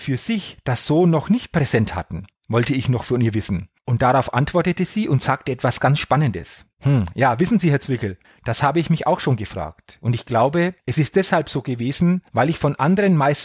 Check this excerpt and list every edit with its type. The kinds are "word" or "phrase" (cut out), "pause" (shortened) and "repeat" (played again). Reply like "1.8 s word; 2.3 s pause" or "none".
2.4 s pause; 3.8 s pause; 6.7 s pause; 8.2 s pause; 10.8 s pause; 12.3 s pause